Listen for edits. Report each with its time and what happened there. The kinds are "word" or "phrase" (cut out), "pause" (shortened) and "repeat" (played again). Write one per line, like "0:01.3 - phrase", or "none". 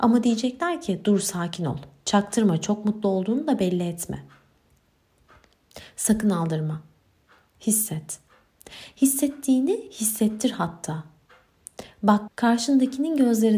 0:12.3 - word